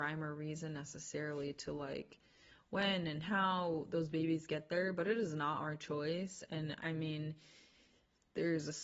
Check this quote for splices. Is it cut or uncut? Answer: uncut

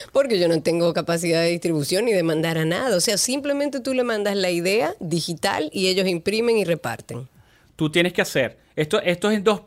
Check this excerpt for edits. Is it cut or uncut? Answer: uncut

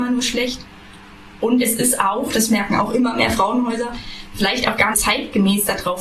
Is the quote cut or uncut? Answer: cut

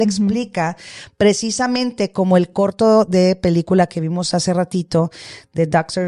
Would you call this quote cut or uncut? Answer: uncut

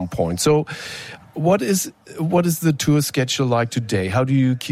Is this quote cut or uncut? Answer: uncut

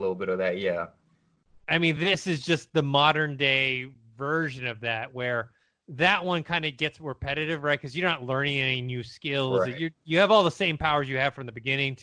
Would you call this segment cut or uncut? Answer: uncut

